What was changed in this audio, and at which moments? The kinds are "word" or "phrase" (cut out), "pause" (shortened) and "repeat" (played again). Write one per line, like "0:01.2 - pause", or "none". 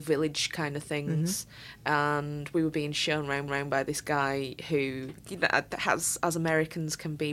0:03.5 - repeat

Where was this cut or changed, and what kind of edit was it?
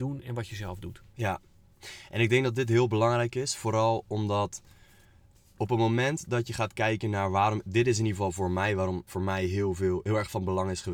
0:09.1 - word

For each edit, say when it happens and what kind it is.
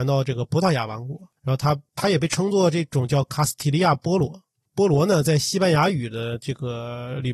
0:01.4 - pause

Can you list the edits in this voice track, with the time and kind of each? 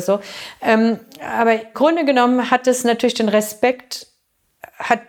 0:01.7 - word

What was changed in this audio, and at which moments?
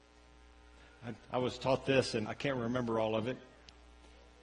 0:02.2 - word

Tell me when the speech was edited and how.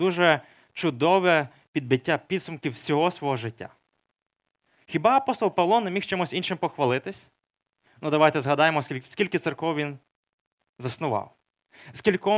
none

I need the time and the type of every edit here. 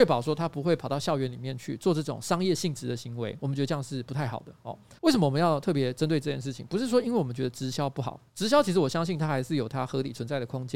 0:05.0 - pause
0:08.3 - pause

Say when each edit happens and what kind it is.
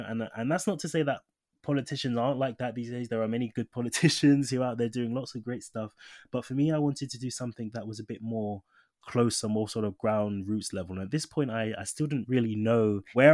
none

